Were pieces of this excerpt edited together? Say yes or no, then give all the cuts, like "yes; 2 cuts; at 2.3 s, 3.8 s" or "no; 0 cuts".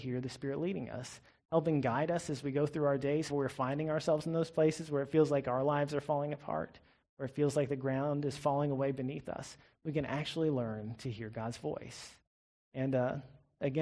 yes; 1 cut; at 3.3 s